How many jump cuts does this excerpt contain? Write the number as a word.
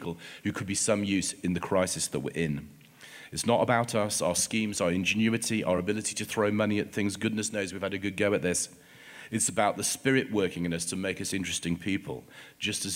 zero